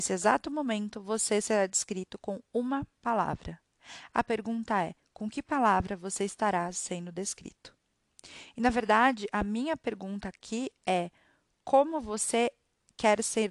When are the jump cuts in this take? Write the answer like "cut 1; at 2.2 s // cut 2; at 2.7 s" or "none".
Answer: none